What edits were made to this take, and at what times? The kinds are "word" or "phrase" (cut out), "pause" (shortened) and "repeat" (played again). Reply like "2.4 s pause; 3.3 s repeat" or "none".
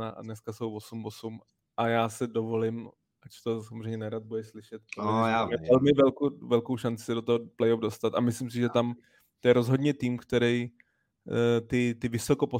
4.9 s pause